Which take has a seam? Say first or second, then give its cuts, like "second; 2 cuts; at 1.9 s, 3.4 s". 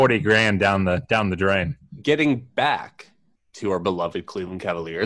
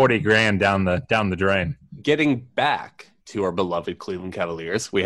second; 1 cut; at 3.2 s